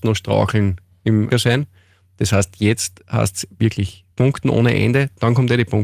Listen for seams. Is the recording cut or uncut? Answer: cut